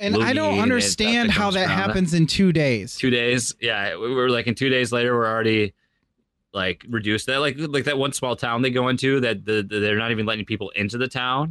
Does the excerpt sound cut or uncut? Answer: uncut